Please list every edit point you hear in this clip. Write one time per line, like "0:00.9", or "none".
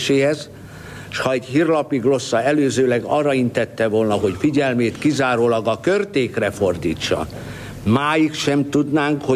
none